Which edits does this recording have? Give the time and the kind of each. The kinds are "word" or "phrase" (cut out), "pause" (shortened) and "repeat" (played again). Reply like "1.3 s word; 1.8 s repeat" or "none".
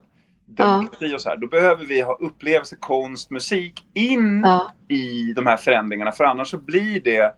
none